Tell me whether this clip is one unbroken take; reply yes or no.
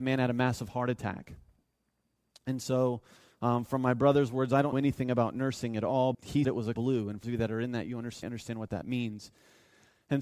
no